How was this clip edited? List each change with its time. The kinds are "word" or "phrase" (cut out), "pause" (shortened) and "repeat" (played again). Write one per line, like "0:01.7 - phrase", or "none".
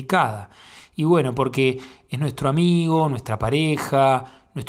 none